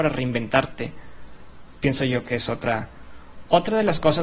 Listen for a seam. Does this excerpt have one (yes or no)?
no